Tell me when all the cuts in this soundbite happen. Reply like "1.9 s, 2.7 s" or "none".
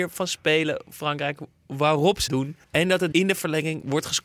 0.9 s, 2.3 s, 2.6 s, 3.1 s